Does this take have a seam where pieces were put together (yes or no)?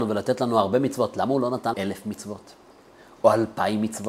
yes